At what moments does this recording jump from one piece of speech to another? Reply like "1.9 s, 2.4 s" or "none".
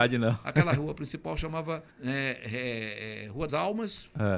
1.9 s, 3.5 s